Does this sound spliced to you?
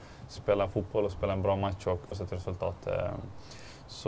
yes; 1 cut; at 2.1 s

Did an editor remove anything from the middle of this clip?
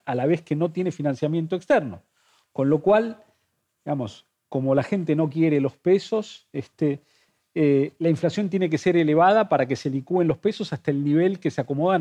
no; 0 cuts

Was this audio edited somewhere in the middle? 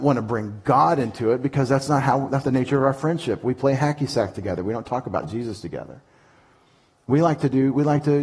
yes; 1 cut; at 2.4 s

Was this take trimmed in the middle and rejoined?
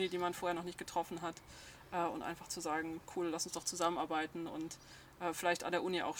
no; 0 cuts

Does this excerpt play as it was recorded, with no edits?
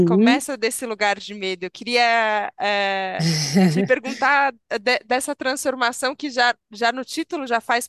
yes; 0 cuts

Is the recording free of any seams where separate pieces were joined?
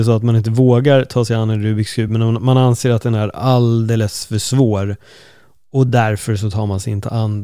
yes; 0 cuts

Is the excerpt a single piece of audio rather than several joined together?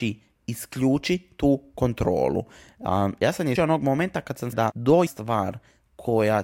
no; 3 cuts; at 3.6 s, 4.5 s, 5.1 s

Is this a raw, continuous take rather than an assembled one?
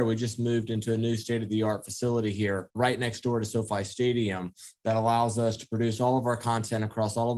yes; 0 cuts

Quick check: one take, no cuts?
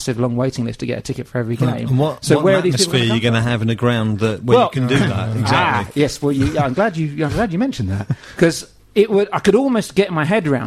yes; 0 cuts

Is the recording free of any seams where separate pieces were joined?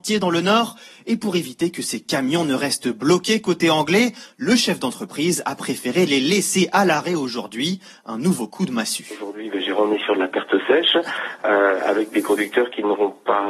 yes; 0 cuts

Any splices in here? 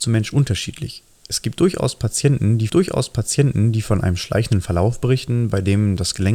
yes; 1 cut; at 2.7 s

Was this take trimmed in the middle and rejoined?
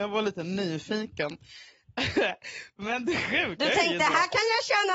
no; 0 cuts

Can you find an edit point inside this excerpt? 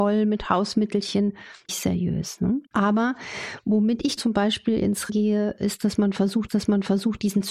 yes; 5 cuts; at 1.7 s, 2.7 s, 4.2 s, 5.1 s, 6.5 s

